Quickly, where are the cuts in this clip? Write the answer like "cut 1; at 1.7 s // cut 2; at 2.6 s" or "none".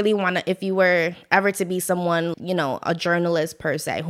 cut 1; at 2.3 s